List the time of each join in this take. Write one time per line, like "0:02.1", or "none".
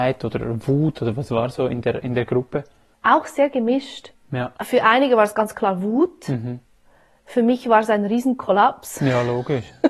0:04.5